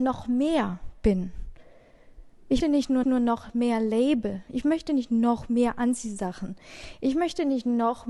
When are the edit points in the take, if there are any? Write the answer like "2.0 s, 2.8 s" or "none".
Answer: 2.6 s, 3.0 s